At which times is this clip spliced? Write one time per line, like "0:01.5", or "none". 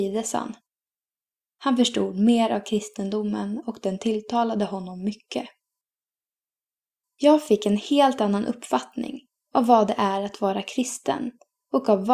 none